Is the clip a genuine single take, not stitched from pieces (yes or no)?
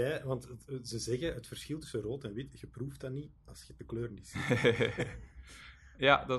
yes